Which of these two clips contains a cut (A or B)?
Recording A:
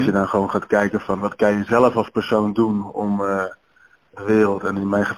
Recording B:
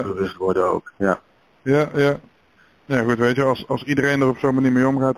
A